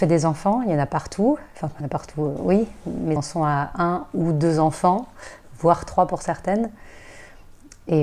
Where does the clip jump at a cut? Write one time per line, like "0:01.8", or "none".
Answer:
0:01.8
0:03.2